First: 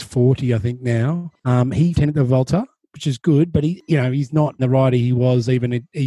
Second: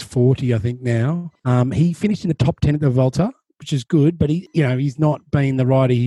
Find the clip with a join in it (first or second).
first